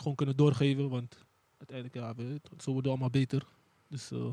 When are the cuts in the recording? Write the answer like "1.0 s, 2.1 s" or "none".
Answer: none